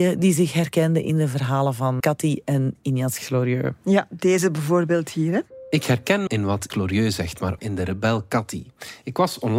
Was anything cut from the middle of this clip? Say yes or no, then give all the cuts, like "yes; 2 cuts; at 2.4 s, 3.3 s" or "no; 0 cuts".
yes; 4 cuts; at 2.0 s, 6.3 s, 6.7 s, 7.6 s